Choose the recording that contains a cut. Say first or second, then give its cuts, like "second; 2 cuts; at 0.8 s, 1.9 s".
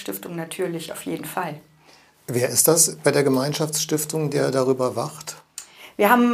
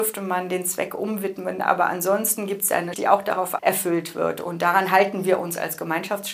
second; 2 cuts; at 2.9 s, 3.6 s